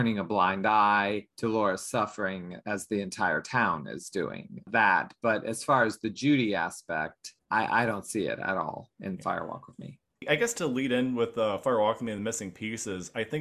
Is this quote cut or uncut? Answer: uncut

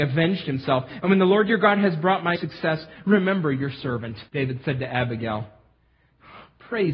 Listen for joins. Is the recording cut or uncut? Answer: cut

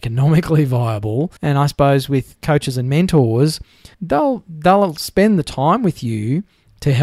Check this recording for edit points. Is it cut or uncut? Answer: cut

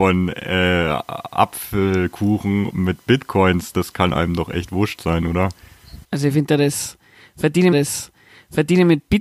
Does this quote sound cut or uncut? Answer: cut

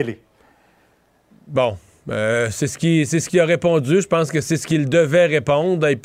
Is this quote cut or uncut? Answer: uncut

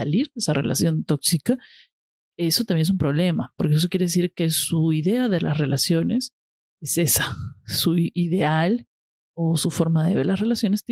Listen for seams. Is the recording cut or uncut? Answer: uncut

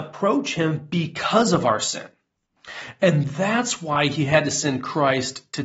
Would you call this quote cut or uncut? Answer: uncut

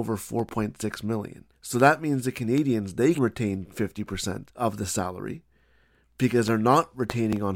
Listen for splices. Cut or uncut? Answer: cut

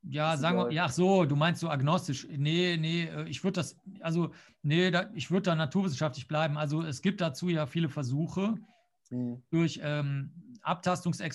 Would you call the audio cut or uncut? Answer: uncut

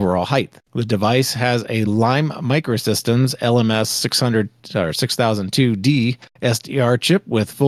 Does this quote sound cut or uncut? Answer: uncut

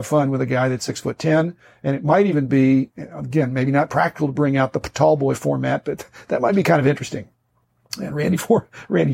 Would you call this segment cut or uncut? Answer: uncut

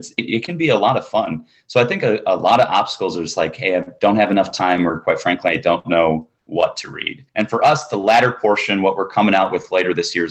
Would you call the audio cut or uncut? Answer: cut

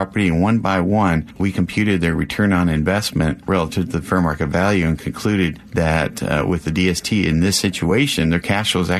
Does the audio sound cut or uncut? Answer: uncut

